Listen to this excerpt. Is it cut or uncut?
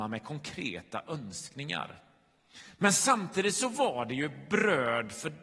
uncut